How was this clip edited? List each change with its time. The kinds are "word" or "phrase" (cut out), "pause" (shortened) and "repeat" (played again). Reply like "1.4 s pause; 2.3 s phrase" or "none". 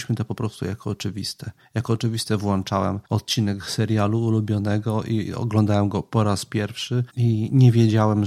3.0 s pause; 7.1 s pause